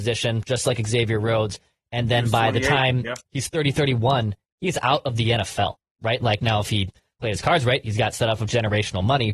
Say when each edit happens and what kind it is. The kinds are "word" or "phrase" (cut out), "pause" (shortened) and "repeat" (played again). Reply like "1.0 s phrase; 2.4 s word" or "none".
none